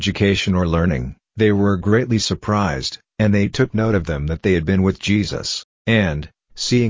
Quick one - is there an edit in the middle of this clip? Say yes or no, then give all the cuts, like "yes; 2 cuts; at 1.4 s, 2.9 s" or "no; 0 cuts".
yes; 1 cut; at 5.7 s